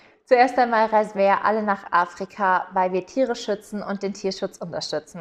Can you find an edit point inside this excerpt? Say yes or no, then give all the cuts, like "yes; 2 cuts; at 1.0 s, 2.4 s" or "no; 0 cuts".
no; 0 cuts